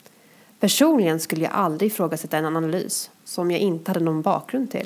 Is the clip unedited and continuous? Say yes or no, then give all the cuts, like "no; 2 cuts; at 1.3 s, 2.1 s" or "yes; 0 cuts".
yes; 0 cuts